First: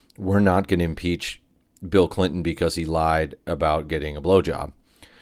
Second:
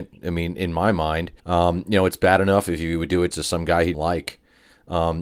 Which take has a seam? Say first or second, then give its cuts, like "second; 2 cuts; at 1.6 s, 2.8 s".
second; 3 cuts; at 1.4 s, 3.3 s, 3.9 s